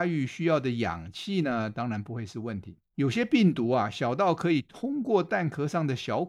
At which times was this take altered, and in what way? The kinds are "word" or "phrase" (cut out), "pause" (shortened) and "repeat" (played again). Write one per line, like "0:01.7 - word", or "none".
0:02.9 - pause